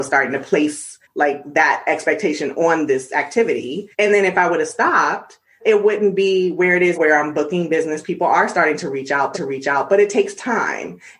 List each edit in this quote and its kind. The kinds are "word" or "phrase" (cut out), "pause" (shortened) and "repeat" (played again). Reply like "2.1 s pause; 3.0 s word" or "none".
1.0 s pause; 3.9 s pause; 5.6 s word; 6.9 s word; 9.3 s repeat